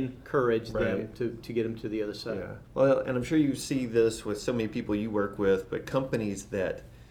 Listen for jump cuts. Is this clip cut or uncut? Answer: cut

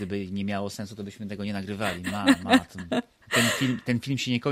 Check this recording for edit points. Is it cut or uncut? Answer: uncut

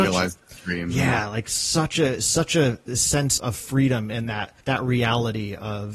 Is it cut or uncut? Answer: cut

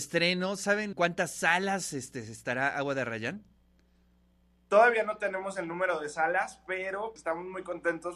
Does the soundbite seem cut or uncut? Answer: cut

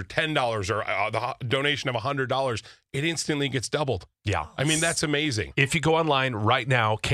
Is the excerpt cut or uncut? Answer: cut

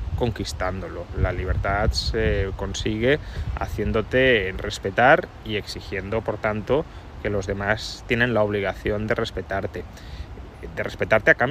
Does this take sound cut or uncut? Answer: uncut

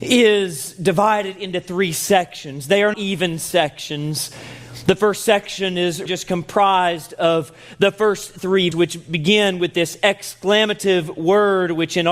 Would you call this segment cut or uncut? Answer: cut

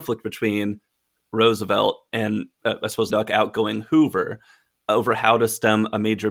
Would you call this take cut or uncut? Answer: cut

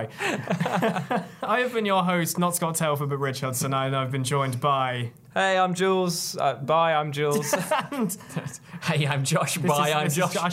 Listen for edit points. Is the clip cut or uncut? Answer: uncut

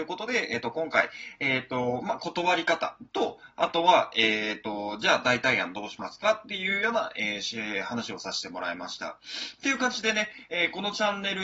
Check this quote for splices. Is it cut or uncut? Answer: uncut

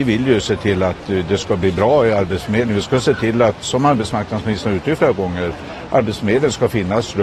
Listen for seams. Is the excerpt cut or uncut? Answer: uncut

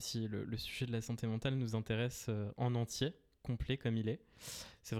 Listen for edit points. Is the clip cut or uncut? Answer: uncut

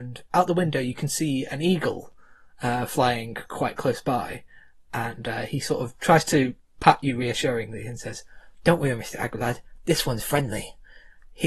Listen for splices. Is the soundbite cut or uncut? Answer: uncut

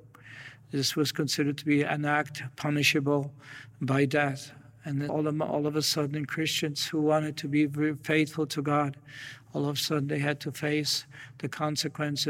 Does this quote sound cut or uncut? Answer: cut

